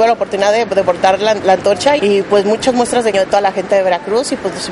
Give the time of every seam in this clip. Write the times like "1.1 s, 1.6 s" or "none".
2.0 s, 3.1 s

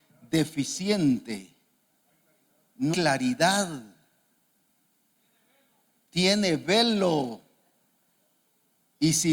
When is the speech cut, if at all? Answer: 2.9 s

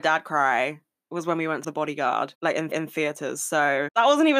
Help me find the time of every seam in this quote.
1.6 s, 2.7 s

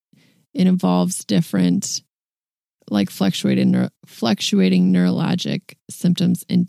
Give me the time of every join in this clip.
none

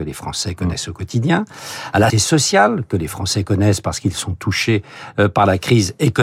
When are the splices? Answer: 2.1 s

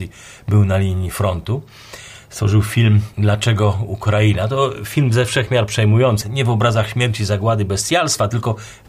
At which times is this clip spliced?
3.1 s, 6.2 s

